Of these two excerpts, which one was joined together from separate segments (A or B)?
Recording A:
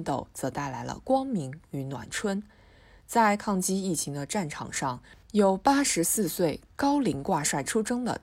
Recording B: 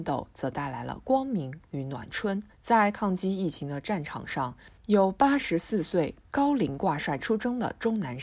B